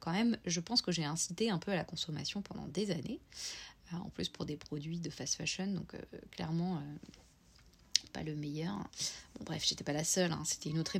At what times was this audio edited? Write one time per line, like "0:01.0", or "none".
none